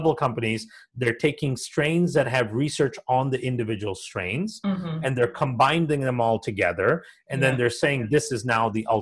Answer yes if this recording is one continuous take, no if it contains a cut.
yes